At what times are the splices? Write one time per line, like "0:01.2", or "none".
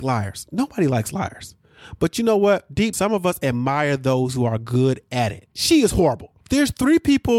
0:02.9
0:05.5
0:06.4